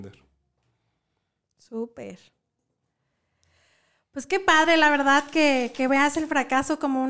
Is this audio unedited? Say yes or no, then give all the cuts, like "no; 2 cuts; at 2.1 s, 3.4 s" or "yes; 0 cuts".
yes; 0 cuts